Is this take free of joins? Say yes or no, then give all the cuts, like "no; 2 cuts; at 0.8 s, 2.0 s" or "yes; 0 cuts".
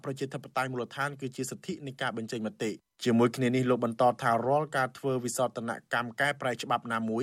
no; 1 cut; at 2.8 s